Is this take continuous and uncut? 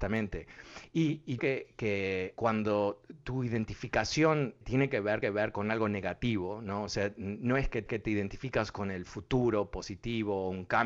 no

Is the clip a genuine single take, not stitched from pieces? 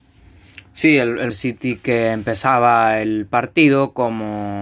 no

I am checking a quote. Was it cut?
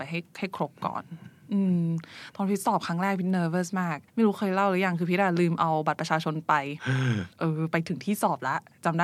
yes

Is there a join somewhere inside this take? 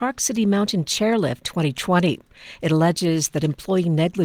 yes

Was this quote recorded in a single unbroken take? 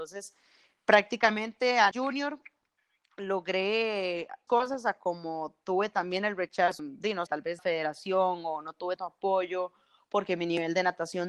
no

